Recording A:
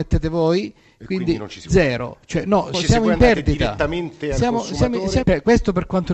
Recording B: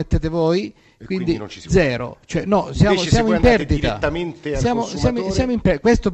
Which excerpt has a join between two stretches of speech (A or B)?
A